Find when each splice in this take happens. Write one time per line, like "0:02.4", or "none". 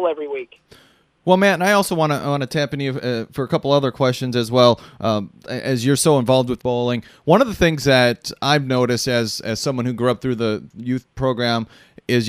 0:06.6